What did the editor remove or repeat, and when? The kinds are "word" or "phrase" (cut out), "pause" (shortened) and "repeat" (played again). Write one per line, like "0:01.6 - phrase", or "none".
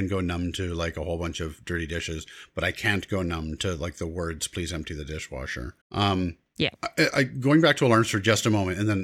0:05.8 - pause
0:06.8 - pause